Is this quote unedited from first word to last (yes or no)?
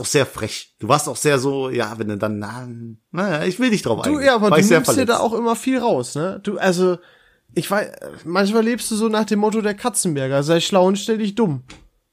yes